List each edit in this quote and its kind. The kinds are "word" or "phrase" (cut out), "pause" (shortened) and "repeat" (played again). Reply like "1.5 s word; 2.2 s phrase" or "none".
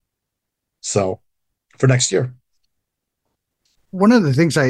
none